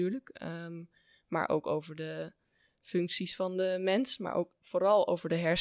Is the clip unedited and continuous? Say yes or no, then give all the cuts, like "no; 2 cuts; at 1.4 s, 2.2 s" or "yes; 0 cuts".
yes; 0 cuts